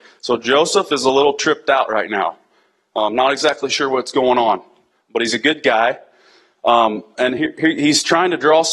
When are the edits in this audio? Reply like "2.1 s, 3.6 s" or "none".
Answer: none